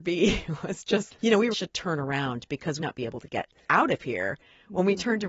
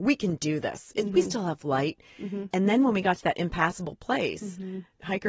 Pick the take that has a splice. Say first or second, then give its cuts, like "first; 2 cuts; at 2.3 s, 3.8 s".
first; 3 cuts; at 1.1 s, 1.5 s, 2.8 s